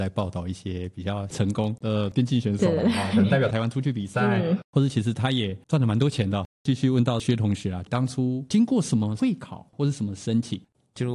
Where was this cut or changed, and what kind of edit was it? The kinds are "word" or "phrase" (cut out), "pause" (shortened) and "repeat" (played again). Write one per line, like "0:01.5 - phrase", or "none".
none